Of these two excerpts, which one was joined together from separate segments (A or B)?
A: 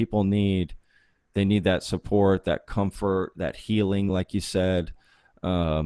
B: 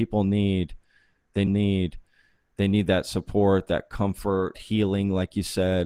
B